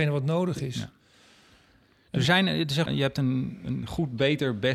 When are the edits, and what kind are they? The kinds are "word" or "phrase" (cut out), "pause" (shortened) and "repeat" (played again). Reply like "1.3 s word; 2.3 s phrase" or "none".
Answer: 2.2 s word; 2.9 s word